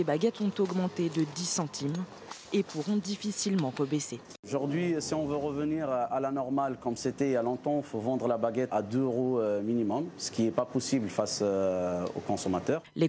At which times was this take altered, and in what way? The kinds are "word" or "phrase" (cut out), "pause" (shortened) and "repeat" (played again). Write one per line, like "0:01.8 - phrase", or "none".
0:08.7 - word